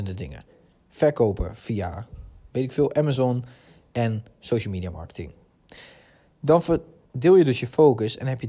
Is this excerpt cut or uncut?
uncut